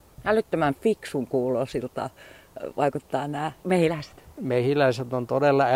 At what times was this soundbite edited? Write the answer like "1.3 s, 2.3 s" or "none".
3.6 s